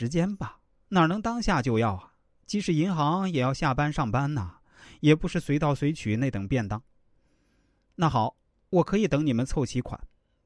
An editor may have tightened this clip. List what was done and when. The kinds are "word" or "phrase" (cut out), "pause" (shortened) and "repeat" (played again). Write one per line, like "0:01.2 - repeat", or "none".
none

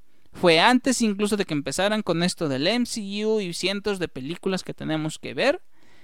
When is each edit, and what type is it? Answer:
none

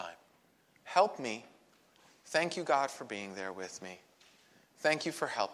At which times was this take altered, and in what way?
none

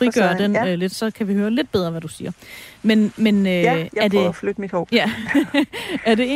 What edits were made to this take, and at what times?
0:00.9 - word

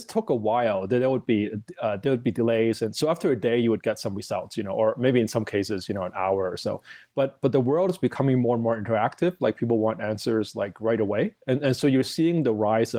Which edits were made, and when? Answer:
none

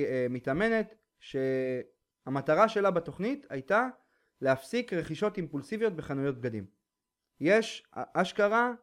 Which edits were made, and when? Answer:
none

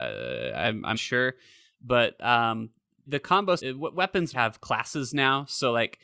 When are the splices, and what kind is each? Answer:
0:00.9 - word
0:03.1 - word
0:03.6 - word
0:04.3 - word

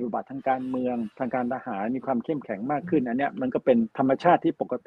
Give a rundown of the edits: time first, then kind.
0:01.1 - pause
0:03.9 - pause

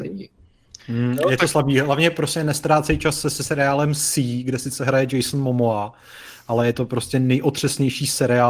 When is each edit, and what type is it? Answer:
none

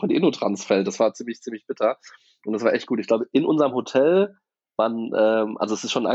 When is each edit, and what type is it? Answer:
none

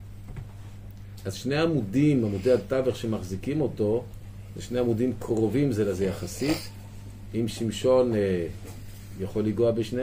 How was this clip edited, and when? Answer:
none

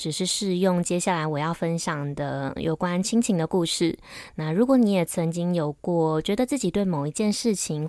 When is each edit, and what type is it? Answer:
0:02.6 - word

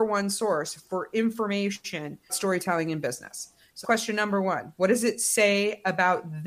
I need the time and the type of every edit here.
0:02.3 - word
0:03.8 - word

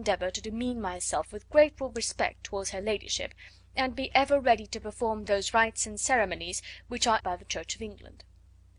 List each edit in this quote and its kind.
0:07.2 - word

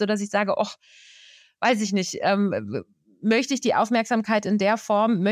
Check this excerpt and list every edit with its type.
none

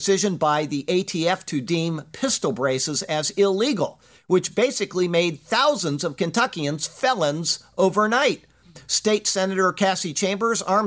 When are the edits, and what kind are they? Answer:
none

